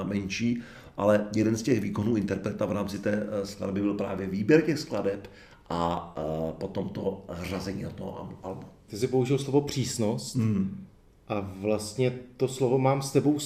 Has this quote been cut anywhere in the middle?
no; 0 cuts

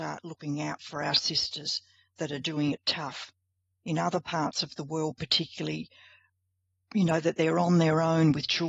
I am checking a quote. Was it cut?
no; 0 cuts

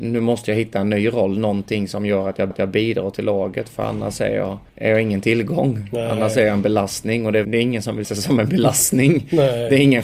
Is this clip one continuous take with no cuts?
no; 4 cuts; at 2.5 s, 4.7 s, 7.4 s, 8.0 s

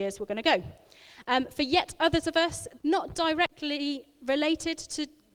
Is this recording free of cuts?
no; 1 cut; at 2.8 s

